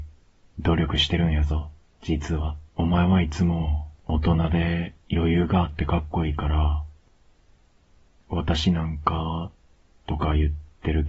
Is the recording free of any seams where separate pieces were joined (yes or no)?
no